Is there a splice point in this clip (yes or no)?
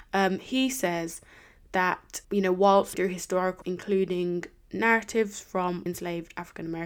yes